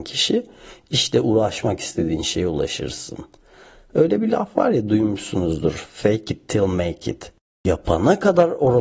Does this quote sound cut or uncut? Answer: uncut